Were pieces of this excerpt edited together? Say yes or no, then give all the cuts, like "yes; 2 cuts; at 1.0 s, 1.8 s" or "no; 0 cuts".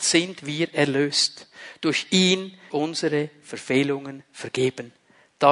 yes; 1 cut; at 2.7 s